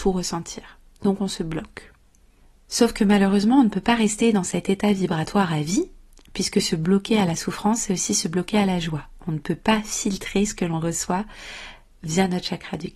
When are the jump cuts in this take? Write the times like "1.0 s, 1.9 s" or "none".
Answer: none